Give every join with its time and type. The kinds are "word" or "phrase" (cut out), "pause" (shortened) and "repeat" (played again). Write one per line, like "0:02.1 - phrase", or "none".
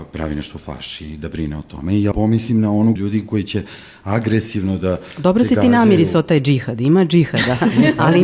0:02.1 - word
0:03.0 - word